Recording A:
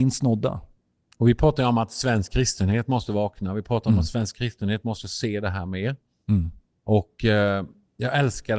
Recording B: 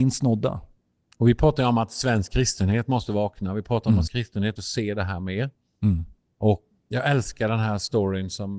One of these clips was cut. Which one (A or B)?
B